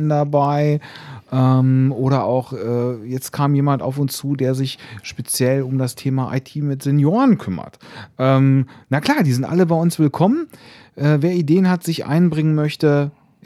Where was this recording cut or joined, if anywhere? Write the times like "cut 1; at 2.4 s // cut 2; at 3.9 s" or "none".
none